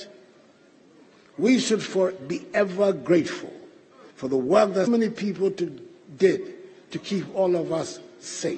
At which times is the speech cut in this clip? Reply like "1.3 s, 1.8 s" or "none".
4.1 s, 4.9 s